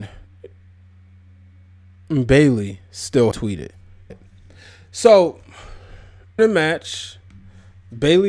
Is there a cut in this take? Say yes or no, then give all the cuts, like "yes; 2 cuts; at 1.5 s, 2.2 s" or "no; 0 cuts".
yes; 3 cuts; at 3.3 s, 4.1 s, 6.4 s